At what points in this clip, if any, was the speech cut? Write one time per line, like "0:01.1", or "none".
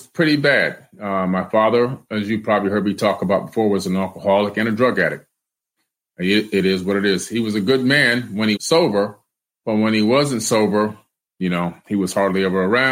0:08.6

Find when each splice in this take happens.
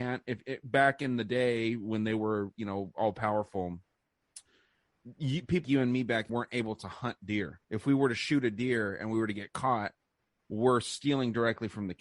0:05.6
0:06.3
0:07.6

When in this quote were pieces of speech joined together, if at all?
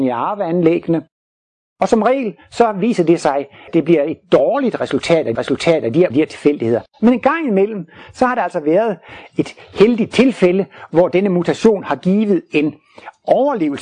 0:05.3
0:06.1
0:06.9

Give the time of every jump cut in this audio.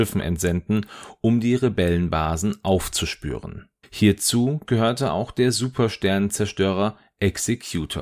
0:03.8

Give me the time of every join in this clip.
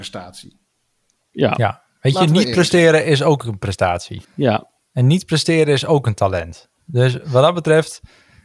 0:04.2

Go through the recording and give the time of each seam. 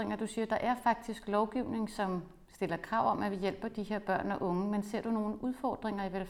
none

